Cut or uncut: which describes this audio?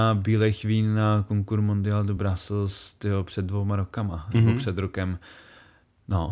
uncut